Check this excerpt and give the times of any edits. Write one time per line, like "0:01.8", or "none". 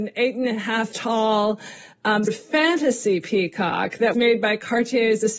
0:00.9
0:02.3
0:04.1